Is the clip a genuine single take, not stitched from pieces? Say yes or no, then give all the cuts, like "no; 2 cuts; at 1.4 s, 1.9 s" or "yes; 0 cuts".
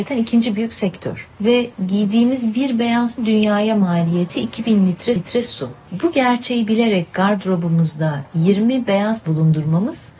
no; 3 cuts; at 3.2 s, 5.2 s, 9.2 s